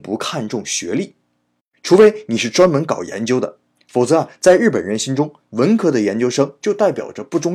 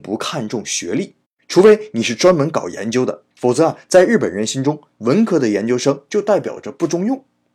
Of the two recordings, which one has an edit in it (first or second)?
second